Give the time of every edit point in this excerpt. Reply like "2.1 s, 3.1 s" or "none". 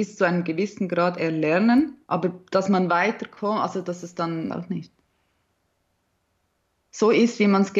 2.0 s, 4.5 s